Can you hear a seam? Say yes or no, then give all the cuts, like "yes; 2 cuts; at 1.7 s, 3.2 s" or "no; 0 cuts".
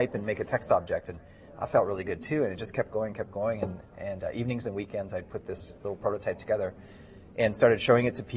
no; 0 cuts